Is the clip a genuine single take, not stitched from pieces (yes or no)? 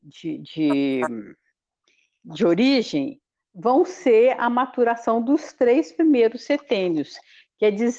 yes